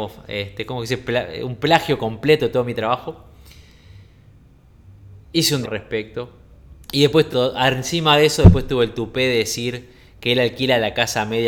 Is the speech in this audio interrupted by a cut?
yes; 4 cuts; at 5.2 s, 5.6 s, 6.8 s, 7.3 s

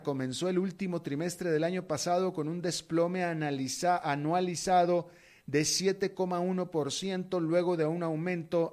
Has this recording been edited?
no; 0 cuts

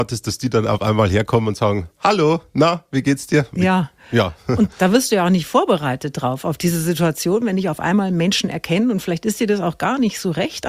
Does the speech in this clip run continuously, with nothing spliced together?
yes; 0 cuts

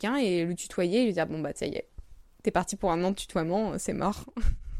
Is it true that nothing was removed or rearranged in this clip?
yes; 0 cuts

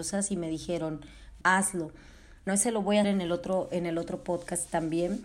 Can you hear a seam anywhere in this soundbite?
yes; 3 cuts; at 1.4 s, 2.5 s, 3.0 s

